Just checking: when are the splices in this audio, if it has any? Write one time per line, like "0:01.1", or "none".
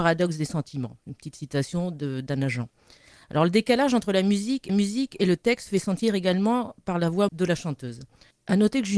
0:04.7
0:07.3